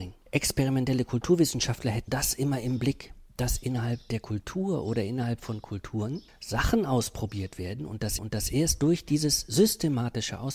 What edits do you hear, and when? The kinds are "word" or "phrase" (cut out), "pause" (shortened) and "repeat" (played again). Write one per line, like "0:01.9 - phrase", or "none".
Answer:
0:02.1 - word
0:08.2 - repeat